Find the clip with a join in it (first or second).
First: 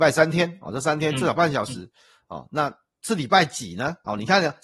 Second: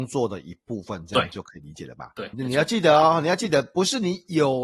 second